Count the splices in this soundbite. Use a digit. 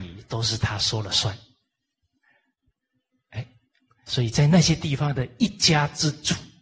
1